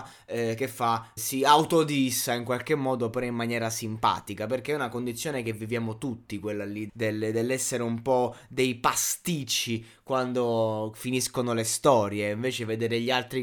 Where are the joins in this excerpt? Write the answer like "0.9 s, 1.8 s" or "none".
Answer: 1.2 s, 6.9 s